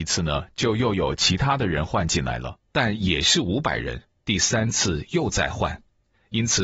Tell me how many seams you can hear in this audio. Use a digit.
2